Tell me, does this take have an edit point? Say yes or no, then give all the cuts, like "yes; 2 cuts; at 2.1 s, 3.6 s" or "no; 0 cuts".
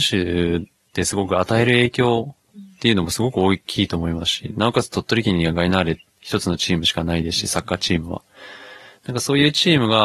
no; 0 cuts